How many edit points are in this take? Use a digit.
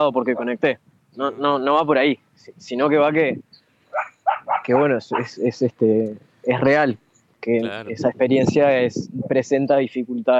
0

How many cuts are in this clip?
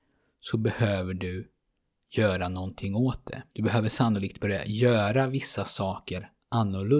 1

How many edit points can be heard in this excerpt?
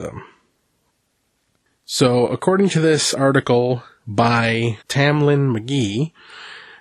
1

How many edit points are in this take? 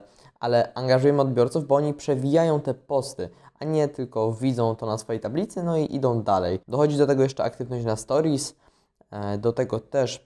1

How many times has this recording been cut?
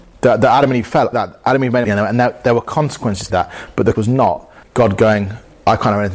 5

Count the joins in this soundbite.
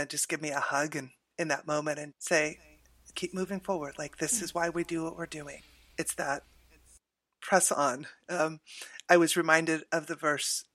2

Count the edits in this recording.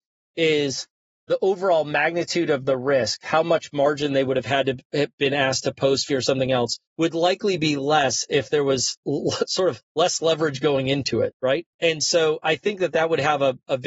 4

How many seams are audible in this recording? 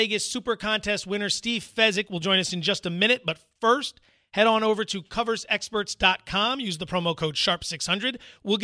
0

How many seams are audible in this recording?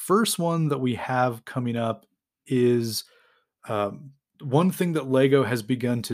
0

